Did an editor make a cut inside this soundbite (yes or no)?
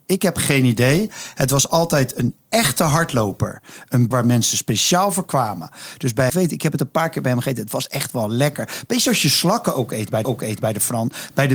yes